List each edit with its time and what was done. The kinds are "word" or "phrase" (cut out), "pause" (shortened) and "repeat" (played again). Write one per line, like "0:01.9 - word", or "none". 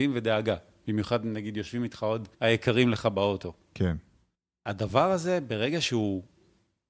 0:02.3 - pause
0:04.3 - pause